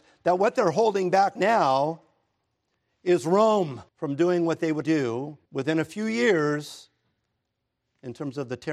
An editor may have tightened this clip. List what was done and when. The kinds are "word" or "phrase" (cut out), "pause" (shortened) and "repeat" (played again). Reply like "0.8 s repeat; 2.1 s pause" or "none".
1.4 s word; 3.9 s pause; 4.8 s word; 5.5 s pause